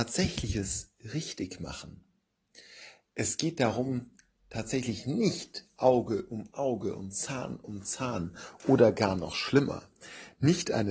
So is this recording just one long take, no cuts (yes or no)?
yes